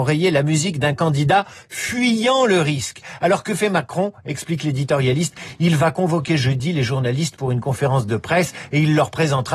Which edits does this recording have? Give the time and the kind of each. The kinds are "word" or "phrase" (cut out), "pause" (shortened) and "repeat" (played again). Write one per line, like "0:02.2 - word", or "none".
none